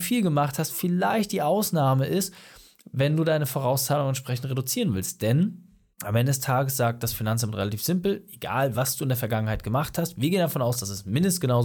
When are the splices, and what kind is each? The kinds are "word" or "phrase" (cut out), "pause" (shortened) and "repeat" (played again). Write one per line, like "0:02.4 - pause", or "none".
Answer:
none